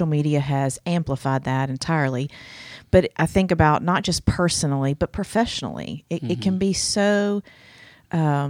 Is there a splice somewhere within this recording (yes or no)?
no